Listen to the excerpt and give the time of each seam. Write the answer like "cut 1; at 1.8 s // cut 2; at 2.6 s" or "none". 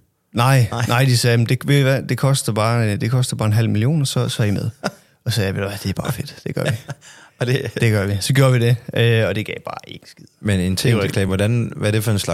none